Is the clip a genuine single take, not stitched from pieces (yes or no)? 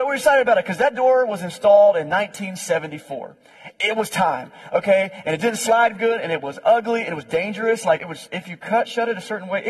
no